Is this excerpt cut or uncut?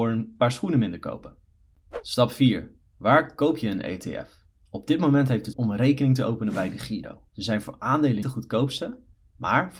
cut